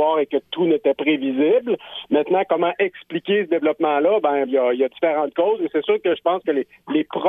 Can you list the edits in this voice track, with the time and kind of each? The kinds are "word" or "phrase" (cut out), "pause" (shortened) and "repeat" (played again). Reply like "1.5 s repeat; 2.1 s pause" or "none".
1.0 s word; 4.5 s word